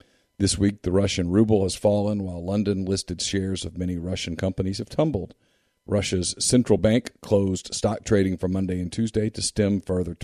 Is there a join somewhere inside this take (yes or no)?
no